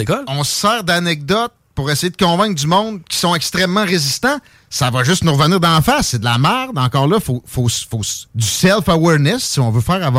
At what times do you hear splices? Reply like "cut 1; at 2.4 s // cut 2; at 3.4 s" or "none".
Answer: cut 1; at 8.3 s

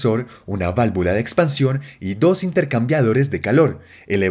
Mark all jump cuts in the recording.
none

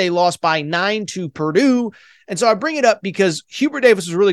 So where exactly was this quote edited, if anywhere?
none

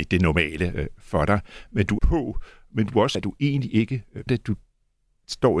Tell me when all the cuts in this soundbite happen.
cut 1; at 2.0 s // cut 2; at 3.1 s // cut 3; at 4.3 s

